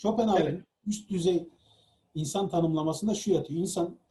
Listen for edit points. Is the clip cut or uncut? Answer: uncut